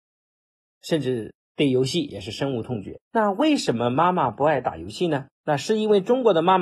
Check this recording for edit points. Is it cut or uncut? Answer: cut